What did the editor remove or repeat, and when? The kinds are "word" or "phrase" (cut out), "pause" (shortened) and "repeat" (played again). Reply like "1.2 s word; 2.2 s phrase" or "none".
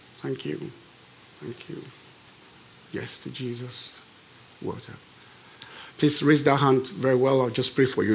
5.9 s pause